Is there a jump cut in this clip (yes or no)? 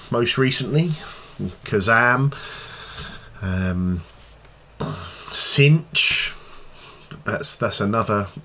yes